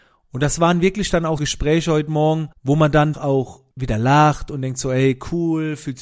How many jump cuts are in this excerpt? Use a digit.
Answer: 4